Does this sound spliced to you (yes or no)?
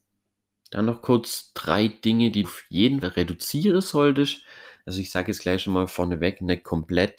yes